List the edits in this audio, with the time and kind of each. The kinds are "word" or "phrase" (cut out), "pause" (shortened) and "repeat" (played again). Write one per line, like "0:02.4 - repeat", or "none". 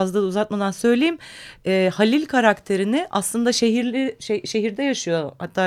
none